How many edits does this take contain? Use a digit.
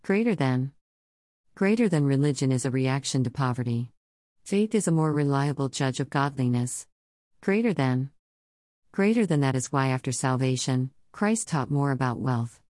0